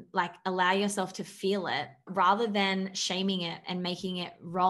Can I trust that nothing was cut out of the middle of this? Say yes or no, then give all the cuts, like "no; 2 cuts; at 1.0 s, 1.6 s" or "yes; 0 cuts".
no; 1 cut; at 2.1 s